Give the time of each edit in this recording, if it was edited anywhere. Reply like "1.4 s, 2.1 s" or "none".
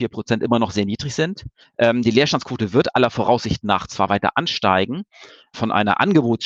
1.6 s, 5.5 s

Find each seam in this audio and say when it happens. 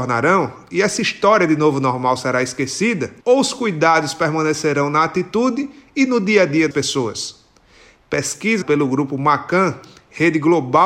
3.2 s, 6.7 s, 8.6 s

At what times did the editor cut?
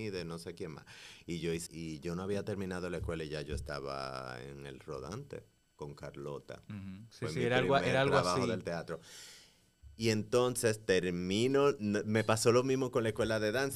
1.7 s

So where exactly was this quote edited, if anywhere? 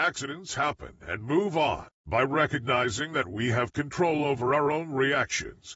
none

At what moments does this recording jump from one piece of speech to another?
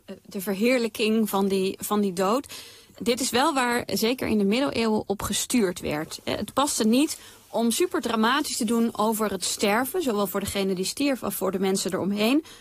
none

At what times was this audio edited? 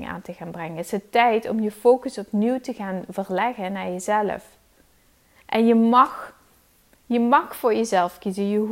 none

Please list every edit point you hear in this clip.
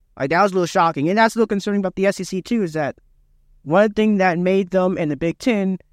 3.1 s

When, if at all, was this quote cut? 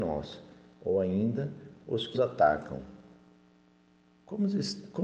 2.1 s

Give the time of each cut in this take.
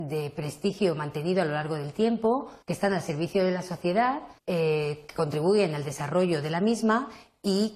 2.6 s, 4.4 s

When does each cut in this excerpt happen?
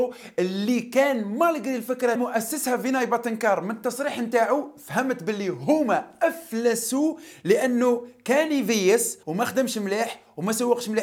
2.2 s, 9.2 s

